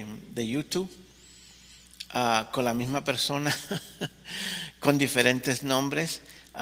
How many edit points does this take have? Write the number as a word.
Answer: zero